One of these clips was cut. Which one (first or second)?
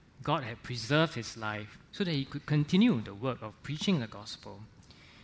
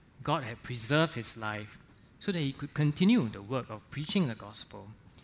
first